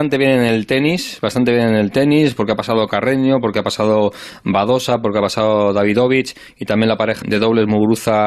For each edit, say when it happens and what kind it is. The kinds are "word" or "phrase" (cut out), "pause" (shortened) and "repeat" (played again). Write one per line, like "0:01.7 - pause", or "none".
0:07.2 - word